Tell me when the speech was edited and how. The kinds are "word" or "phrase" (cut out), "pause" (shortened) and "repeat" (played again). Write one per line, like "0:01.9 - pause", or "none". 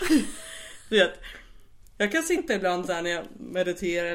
none